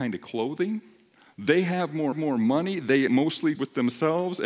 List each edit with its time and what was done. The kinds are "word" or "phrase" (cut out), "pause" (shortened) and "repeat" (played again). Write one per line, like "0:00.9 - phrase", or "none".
0:01.2 - pause
0:02.1 - repeat
0:03.1 - word
0:03.5 - word